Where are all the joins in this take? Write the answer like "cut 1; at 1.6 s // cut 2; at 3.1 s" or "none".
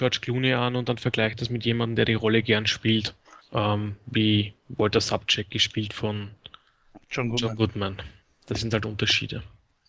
cut 1; at 3.4 s // cut 2; at 4.6 s // cut 3; at 8.2 s